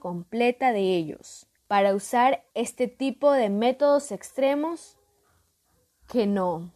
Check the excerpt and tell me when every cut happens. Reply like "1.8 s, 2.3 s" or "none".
1.6 s, 2.5 s